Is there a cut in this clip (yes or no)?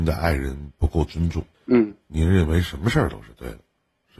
yes